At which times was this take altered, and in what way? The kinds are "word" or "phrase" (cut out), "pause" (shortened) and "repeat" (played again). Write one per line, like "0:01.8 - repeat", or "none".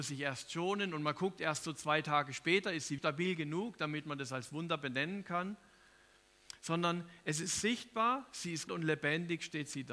0:03.0 - word
0:08.7 - word